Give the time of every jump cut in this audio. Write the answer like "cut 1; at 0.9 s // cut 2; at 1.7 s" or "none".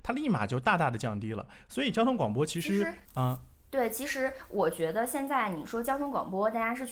cut 1; at 3.0 s